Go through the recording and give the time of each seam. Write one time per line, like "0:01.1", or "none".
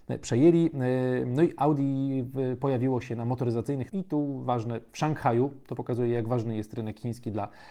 0:03.9

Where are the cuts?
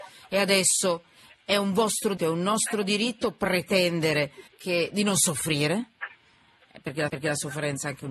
0:02.2
0:04.5
0:07.1

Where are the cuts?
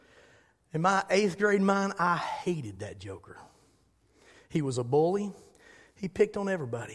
none

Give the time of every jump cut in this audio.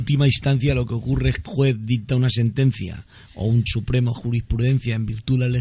0:01.5
0:03.7
0:04.1

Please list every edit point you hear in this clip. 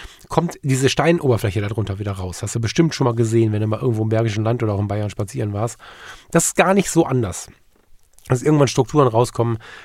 none

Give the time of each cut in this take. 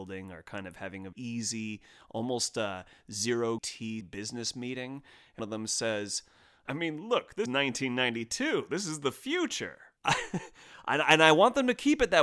0:01.1
0:03.6
0:04.0
0:05.4
0:06.7
0:07.5
0:10.0

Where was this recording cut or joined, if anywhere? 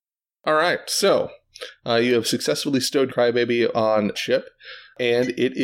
0:03.1
0:03.7
0:04.1

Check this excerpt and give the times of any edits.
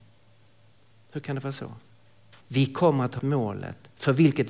0:02.4
0:03.2

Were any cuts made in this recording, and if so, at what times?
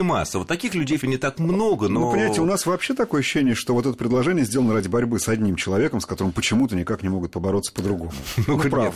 0:01.0

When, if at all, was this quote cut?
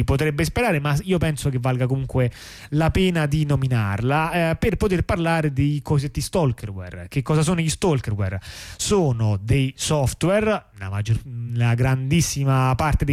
none

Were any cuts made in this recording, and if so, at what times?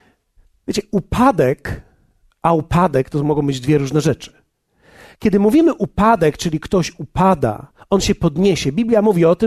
none

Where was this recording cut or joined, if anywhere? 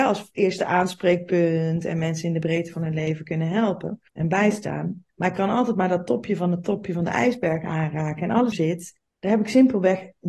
0:04.1
0:05.1
0:08.5
0:09.0

